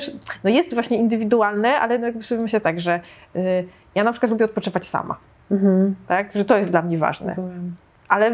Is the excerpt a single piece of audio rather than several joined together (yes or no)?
yes